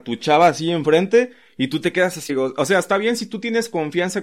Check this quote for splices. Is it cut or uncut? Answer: cut